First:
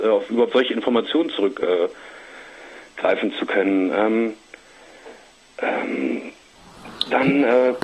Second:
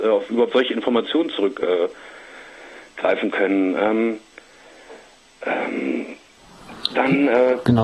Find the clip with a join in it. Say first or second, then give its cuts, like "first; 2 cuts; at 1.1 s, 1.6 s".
second; 1 cut; at 3.3 s